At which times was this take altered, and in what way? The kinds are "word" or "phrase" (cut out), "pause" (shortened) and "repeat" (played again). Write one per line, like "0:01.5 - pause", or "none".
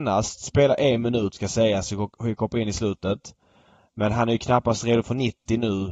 none